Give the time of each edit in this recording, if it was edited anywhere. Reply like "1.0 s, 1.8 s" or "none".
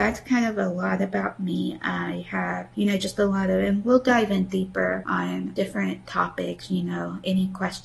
none